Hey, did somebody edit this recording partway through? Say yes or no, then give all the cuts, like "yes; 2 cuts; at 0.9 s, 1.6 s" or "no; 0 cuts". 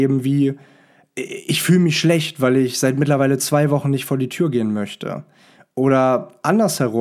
no; 0 cuts